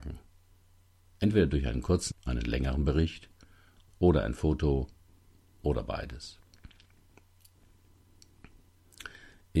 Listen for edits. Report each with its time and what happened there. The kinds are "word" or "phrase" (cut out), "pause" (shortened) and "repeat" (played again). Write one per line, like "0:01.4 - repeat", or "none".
0:02.1 - word